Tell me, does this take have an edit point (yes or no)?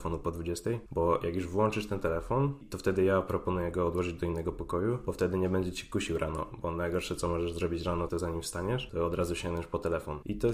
yes